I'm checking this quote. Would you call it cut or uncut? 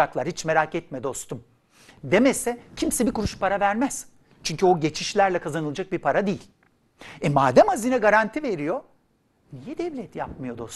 uncut